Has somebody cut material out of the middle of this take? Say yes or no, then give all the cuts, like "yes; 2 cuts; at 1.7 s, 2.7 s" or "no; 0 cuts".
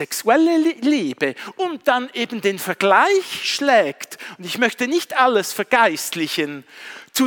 no; 0 cuts